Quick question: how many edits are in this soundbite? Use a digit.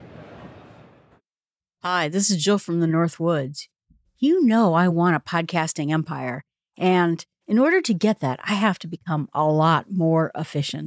0